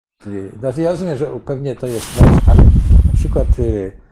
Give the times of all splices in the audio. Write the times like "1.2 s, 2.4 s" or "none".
2.4 s